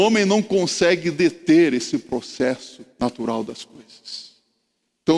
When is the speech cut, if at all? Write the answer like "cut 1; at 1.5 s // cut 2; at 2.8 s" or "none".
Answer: cut 1; at 2.9 s